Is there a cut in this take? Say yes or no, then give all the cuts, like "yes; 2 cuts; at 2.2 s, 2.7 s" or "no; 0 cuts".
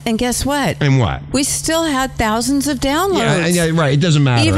no; 0 cuts